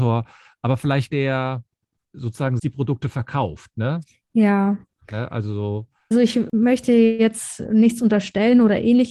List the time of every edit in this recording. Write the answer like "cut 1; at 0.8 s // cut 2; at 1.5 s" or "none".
cut 1; at 1.1 s // cut 2; at 2.6 s // cut 3; at 6.1 s